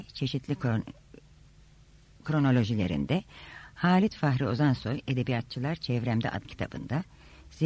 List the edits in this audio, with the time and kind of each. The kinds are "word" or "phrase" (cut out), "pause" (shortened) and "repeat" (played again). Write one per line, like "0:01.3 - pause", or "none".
0:06.4 - word